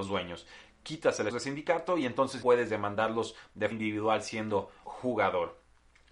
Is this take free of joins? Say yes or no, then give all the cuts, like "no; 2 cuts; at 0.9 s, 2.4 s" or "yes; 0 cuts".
no; 4 cuts; at 1.3 s, 2.4 s, 3.7 s, 4.8 s